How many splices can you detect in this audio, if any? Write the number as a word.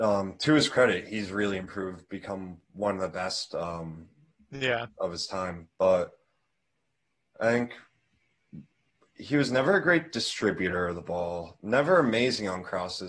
zero